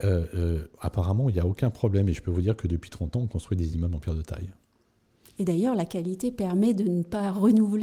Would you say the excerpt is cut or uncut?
uncut